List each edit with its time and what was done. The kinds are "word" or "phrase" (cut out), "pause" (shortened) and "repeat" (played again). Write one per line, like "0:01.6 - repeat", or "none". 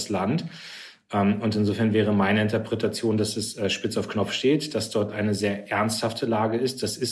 none